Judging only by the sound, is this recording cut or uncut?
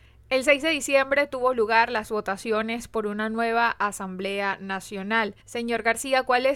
cut